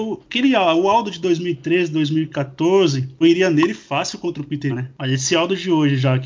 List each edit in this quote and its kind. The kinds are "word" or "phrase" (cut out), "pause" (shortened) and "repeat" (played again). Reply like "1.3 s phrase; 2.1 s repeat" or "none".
3.2 s word; 4.7 s word